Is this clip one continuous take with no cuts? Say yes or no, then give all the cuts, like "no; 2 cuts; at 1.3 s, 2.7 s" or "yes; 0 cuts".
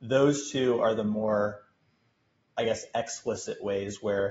yes; 0 cuts